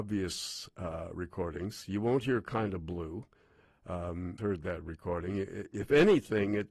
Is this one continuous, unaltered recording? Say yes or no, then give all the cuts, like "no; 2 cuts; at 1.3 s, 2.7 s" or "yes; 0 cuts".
no; 2 cuts; at 4.4 s, 5.7 s